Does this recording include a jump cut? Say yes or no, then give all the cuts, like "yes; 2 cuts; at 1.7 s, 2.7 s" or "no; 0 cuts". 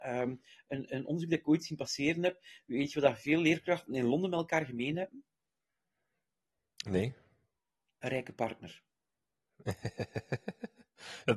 no; 0 cuts